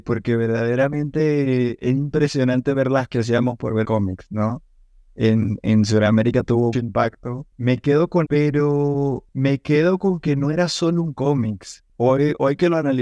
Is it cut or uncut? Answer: cut